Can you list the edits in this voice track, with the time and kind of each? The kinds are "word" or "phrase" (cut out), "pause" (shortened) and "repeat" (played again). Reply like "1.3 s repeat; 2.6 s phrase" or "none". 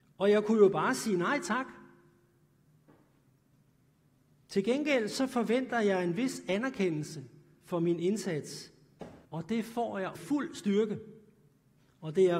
9.2 s pause; 10.2 s phrase